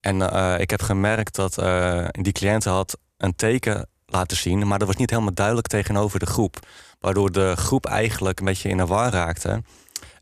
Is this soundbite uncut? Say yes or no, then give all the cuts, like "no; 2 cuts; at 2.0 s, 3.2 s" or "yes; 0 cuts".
yes; 0 cuts